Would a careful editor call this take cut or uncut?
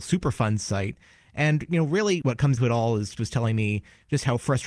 cut